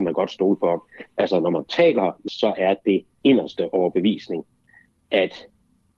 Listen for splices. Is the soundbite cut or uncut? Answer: cut